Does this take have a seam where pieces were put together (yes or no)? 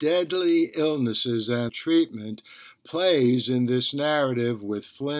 yes